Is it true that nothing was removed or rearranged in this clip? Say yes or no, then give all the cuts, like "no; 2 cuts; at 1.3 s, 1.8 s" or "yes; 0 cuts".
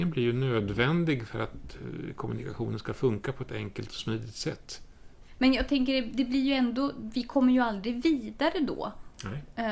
yes; 0 cuts